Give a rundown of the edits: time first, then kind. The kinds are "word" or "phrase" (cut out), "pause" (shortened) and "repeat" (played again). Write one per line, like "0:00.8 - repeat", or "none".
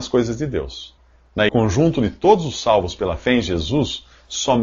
0:01.5 - phrase